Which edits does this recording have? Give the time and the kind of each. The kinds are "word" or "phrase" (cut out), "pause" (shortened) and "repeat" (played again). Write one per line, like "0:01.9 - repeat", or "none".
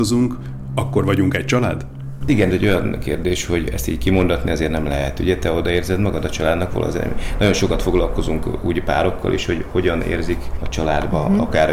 0:02.5 - phrase
0:10.6 - word